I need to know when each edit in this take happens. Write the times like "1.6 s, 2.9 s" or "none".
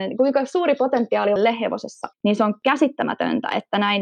1.4 s, 2.1 s